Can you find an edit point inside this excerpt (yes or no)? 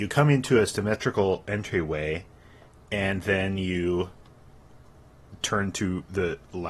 no